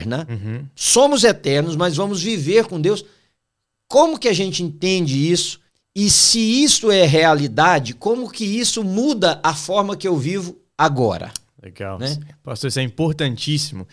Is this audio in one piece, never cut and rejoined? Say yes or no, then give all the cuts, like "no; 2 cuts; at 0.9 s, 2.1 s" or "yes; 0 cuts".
no; 1 cut; at 5.7 s